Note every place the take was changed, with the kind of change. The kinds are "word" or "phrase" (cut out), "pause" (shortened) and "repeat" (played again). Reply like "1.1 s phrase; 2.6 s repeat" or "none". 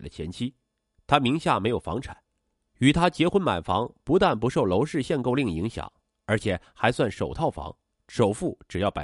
none